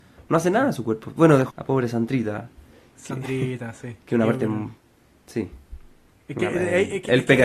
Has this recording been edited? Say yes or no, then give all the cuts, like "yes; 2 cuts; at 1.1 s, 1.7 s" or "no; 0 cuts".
yes; 1 cut; at 1.5 s